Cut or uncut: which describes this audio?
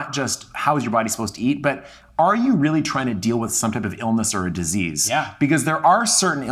uncut